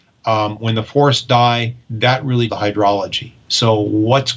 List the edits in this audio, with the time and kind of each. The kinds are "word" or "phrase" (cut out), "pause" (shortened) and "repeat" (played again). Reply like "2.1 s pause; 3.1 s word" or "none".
1.8 s pause; 2.5 s word